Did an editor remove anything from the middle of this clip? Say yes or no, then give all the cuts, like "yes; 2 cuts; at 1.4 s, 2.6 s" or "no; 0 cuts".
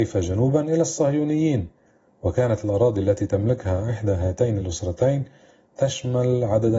no; 0 cuts